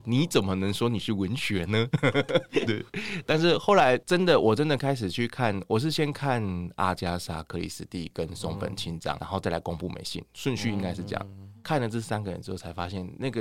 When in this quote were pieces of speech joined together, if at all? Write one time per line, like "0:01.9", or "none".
0:02.7